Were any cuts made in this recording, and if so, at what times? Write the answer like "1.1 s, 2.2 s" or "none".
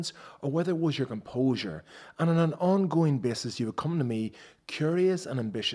none